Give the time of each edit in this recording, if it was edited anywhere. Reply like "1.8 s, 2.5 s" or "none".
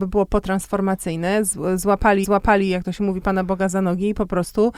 2.2 s

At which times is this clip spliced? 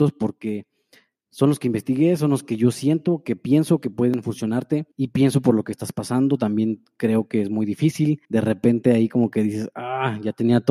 4.9 s, 8.2 s

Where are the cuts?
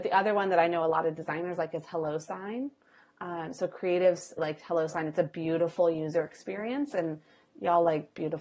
4.4 s

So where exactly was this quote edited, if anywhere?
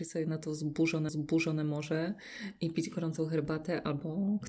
1.1 s

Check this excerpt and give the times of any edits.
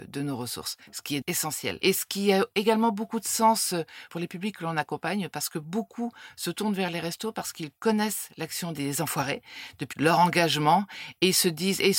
1.2 s, 9.9 s

